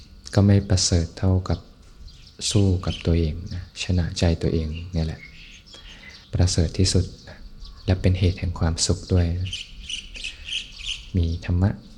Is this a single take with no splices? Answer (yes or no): no